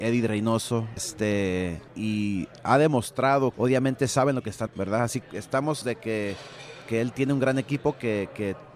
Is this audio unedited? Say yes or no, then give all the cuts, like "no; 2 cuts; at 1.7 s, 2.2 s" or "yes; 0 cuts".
no; 6 cuts; at 1.0 s, 1.9 s, 3.5 s, 4.7 s, 5.2 s, 5.8 s